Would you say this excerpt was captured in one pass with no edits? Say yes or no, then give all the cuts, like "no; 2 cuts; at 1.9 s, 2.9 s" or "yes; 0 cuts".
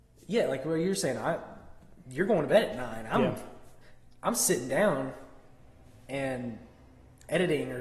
yes; 0 cuts